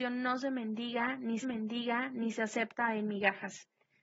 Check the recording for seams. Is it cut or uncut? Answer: cut